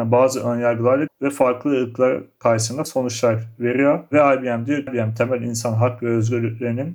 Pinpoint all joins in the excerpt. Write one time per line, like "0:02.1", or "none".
0:01.1
0:02.9
0:04.9